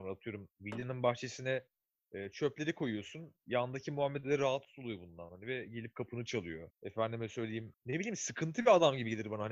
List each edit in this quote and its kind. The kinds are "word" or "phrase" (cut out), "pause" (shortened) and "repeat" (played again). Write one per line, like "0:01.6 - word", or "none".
none